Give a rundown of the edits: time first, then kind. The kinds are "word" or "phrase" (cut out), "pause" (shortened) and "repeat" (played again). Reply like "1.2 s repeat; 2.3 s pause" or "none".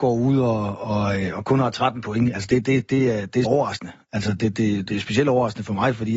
3.4 s word